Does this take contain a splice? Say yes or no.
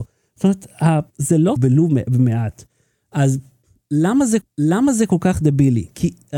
yes